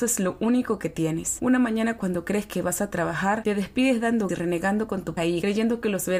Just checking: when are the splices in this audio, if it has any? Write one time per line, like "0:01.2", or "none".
0:02.0
0:04.3
0:05.2